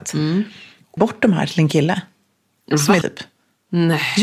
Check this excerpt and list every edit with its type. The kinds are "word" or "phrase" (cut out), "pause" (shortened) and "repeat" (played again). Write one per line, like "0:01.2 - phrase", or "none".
0:01.0 - word
0:03.0 - word